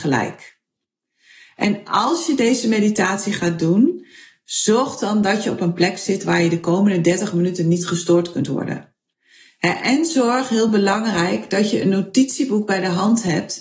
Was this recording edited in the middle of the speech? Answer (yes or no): no